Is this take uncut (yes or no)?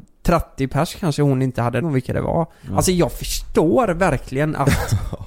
no